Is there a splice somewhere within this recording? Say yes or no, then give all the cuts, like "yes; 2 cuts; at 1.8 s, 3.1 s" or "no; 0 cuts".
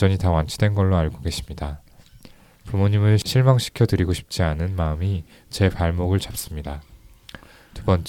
no; 0 cuts